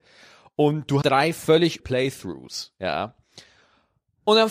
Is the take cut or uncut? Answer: cut